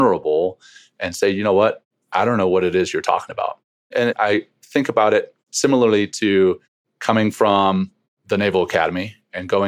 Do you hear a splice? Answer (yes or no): no